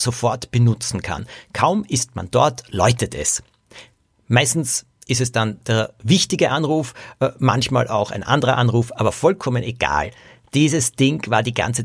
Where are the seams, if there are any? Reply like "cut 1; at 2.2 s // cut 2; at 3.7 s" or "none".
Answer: none

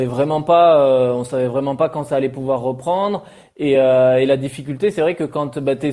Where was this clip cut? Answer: none

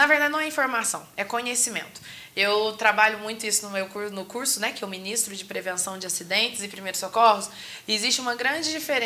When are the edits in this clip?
none

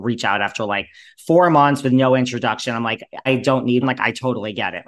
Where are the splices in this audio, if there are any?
cut 1; at 3.3 s // cut 2; at 3.8 s

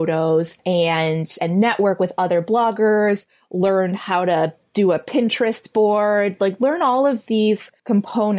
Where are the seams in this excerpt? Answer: none

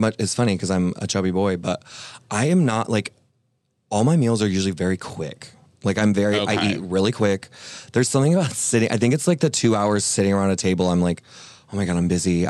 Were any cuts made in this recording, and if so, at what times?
none

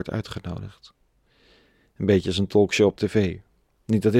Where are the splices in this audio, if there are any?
none

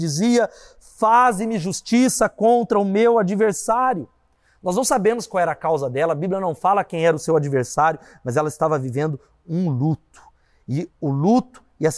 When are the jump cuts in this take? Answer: none

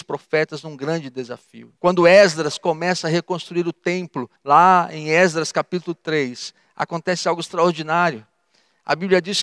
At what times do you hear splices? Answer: cut 1; at 1.8 s // cut 2; at 4.4 s

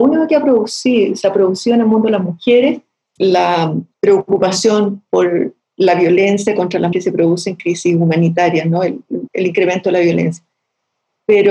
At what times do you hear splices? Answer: cut 1; at 3.2 s // cut 2; at 3.9 s // cut 3; at 6.9 s // cut 4; at 9.3 s

